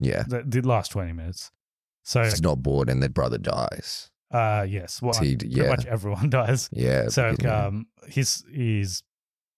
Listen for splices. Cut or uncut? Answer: cut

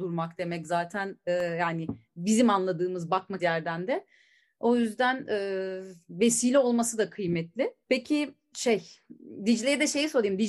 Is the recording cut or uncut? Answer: cut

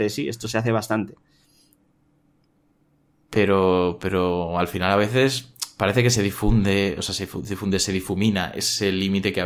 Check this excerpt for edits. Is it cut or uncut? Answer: uncut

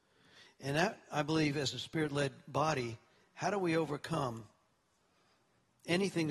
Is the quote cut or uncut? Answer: uncut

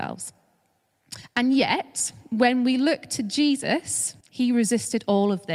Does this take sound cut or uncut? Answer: cut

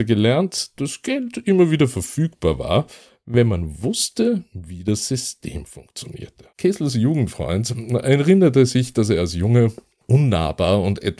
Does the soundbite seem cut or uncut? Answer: cut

